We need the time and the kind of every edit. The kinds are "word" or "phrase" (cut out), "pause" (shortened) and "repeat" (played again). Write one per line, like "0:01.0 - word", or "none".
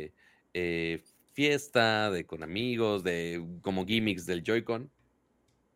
none